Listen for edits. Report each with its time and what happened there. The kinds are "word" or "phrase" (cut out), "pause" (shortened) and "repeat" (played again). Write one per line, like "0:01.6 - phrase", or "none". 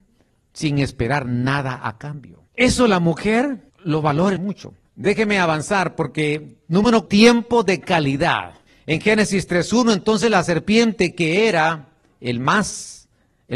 0:02.5 - pause
0:03.7 - pause
0:04.4 - phrase
0:04.8 - pause
0:07.1 - word
0:08.7 - pause